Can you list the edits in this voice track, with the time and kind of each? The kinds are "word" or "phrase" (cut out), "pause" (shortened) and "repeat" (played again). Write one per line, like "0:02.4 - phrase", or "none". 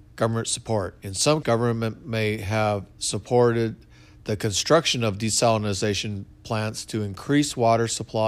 0:01.4 - word